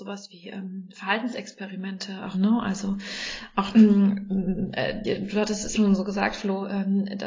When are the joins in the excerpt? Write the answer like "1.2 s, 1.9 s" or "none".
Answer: 2.3 s, 3.7 s, 5.0 s, 5.7 s